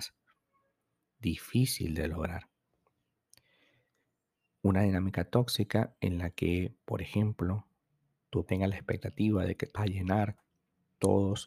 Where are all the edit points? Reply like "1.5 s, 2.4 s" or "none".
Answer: 8.5 s, 9.8 s